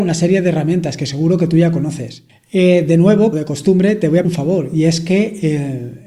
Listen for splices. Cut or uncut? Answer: cut